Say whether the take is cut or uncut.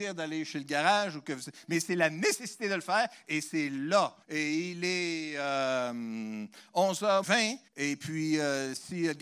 cut